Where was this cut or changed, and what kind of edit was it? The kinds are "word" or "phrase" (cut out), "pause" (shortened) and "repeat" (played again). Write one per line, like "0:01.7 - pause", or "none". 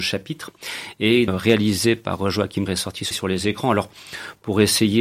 0:01.3 - phrase
0:02.7 - word
0:03.1 - word